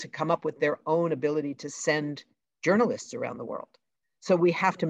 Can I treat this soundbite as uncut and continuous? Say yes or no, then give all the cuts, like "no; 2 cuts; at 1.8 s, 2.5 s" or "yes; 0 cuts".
yes; 0 cuts